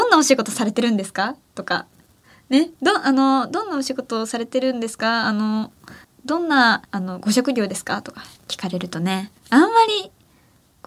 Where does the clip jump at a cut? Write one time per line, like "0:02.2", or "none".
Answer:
0:02.8
0:06.0
0:06.8
0:09.4